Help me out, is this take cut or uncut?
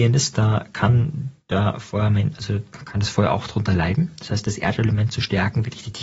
uncut